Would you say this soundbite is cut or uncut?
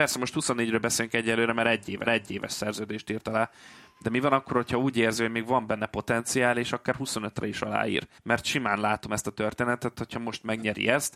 cut